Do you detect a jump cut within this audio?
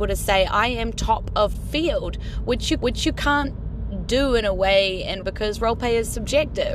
yes; 3 cuts; at 1.5 s, 2.8 s, 5.2 s

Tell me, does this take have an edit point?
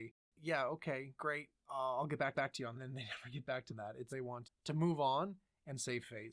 yes; 6 cuts; at 1.6 s, 2.3 s, 2.7 s, 3.7 s, 4.1 s, 4.4 s

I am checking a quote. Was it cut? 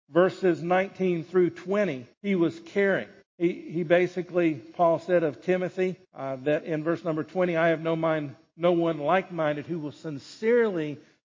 yes; 3 cuts; at 2.1 s, 3.2 s, 6.0 s

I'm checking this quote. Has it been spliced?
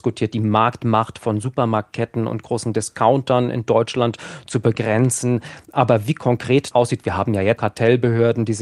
yes; 2 cuts; at 6.7 s, 7.6 s

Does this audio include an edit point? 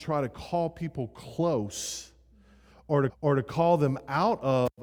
yes; 1 cut; at 3.1 s

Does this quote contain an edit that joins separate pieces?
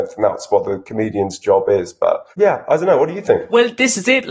yes; 1 cut; at 2.3 s

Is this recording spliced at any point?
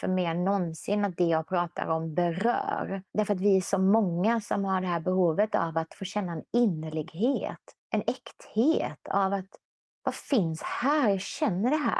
yes; 3 cuts; at 3.1 s, 7.8 s, 9.8 s

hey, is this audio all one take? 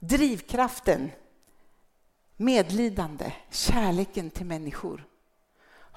yes; 0 cuts

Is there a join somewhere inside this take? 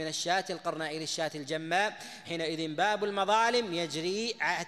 yes; 1 cut; at 2.2 s

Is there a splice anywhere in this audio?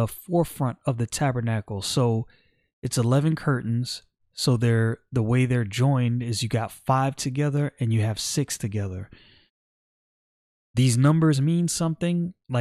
no; 0 cuts

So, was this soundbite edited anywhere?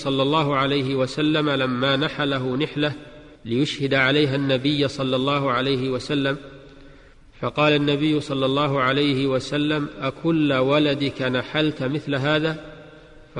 yes; 2 cuts; at 3.4 s, 7.1 s

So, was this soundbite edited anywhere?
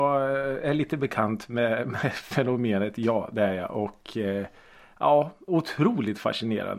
no; 0 cuts

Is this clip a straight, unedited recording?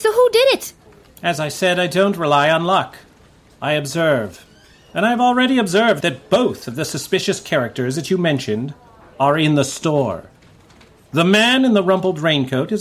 yes; 0 cuts

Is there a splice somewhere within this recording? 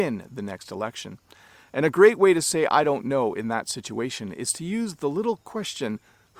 no; 0 cuts

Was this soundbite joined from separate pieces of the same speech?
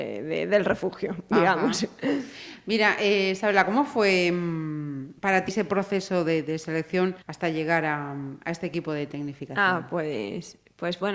yes; 3 cuts; at 5.2 s, 5.5 s, 7.2 s

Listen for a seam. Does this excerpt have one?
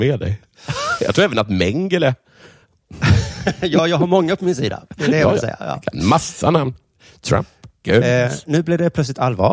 no; 0 cuts

